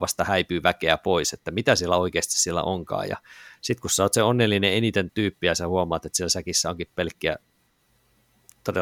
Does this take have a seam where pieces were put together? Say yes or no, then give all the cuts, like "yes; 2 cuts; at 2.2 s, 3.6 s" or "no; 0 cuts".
yes; 1 cut; at 5.1 s